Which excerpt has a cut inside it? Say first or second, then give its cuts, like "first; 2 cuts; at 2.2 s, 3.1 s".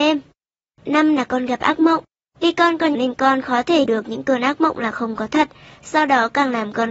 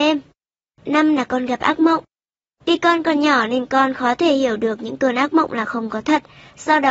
first; 3 cuts; at 2.1 s, 2.9 s, 3.8 s